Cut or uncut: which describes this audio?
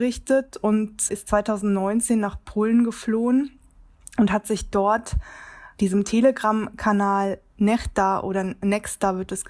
uncut